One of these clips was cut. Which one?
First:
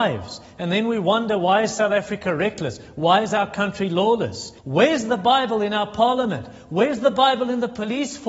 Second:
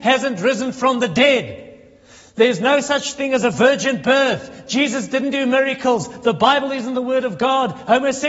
first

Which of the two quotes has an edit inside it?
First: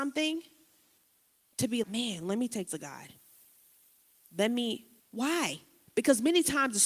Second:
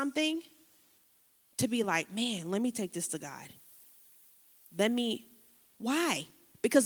first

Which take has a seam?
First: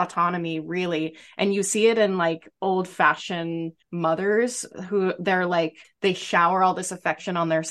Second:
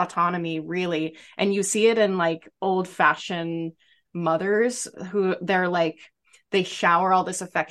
first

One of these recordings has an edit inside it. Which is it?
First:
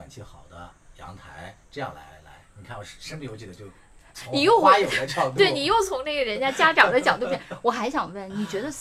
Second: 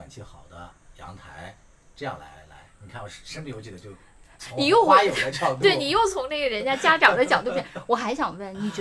first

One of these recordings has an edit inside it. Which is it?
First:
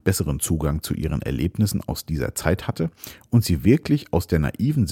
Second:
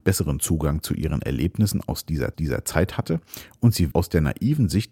second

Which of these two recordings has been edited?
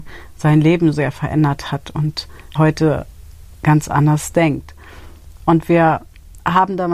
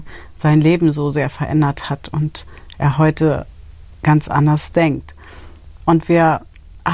first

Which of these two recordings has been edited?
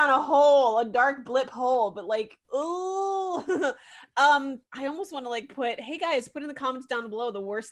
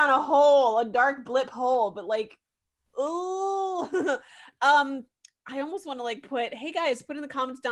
first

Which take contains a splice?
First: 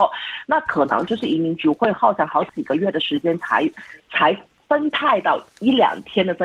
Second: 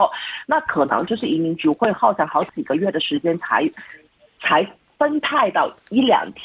first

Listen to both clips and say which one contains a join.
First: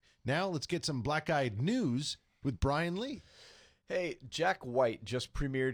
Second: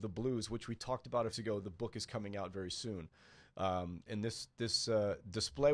second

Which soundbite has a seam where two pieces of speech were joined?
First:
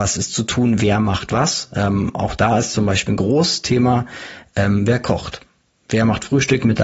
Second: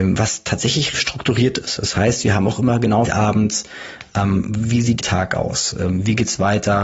second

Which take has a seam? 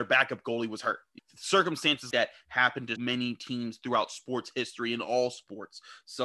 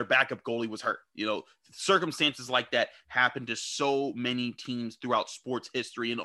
first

